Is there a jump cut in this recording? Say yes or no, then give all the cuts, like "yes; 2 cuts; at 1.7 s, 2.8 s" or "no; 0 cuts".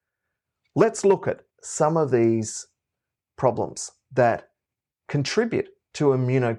no; 0 cuts